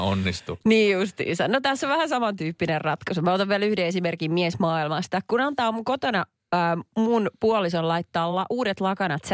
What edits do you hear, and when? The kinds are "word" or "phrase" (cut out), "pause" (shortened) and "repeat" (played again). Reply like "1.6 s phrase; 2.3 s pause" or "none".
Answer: none